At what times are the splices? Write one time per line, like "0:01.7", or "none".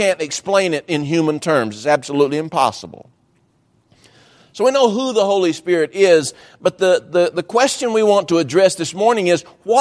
none